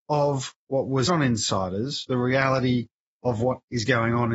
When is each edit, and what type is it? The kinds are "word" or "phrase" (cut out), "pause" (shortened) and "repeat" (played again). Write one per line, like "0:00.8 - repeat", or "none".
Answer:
0:01.1 - word
0:02.1 - word
0:03.1 - pause